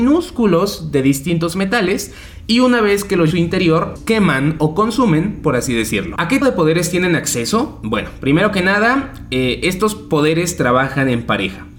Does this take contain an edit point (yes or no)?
yes